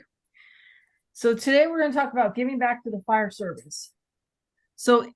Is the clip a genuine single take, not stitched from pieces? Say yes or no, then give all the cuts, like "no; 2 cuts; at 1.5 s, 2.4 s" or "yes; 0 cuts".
yes; 0 cuts